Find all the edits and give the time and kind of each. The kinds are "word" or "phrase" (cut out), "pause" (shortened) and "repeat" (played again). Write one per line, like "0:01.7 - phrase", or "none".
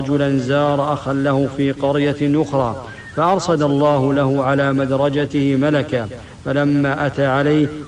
none